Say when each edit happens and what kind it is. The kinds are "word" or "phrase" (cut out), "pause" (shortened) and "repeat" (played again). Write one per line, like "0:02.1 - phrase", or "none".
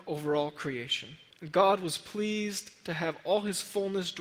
0:01.3 - pause